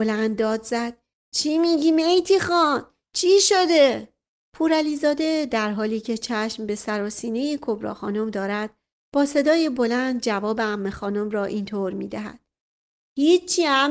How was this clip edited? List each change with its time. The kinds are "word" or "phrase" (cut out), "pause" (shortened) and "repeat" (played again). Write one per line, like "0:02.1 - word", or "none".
none